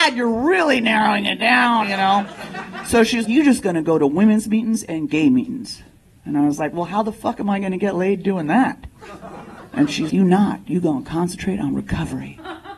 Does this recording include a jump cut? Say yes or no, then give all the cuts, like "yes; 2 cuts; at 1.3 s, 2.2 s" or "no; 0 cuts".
yes; 3 cuts; at 1.8 s, 3.2 s, 10.1 s